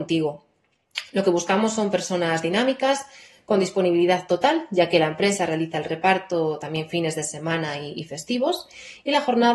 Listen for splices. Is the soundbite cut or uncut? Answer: uncut